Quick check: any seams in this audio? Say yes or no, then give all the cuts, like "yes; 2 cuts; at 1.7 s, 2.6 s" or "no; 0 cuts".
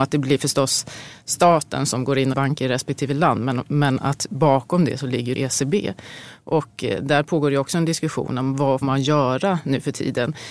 yes; 3 cuts; at 2.3 s, 5.4 s, 8.8 s